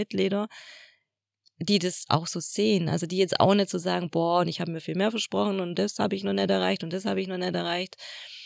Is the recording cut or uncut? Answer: uncut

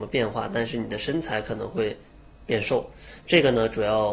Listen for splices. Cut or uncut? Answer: uncut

